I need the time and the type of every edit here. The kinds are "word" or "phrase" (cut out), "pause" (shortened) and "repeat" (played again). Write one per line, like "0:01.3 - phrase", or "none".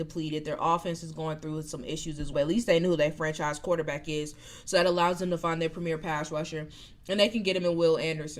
0:02.3 - word